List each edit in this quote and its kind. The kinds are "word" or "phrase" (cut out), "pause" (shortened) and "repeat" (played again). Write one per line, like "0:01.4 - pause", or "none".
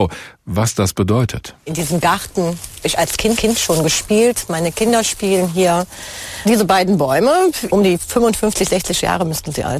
0:01.6 - pause
0:02.8 - word
0:03.4 - repeat
0:07.7 - phrase